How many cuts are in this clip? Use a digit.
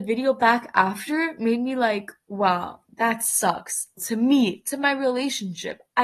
1